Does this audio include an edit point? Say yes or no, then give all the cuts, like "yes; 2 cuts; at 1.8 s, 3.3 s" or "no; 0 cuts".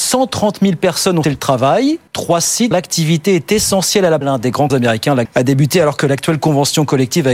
yes; 6 cuts; at 1.2 s, 2.1 s, 2.7 s, 4.2 s, 4.7 s, 5.2 s